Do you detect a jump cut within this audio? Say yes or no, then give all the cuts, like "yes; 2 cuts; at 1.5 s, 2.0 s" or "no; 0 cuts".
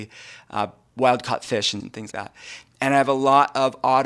yes; 2 cuts; at 1.8 s, 2.1 s